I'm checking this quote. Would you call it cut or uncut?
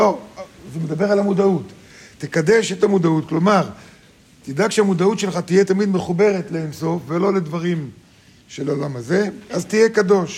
uncut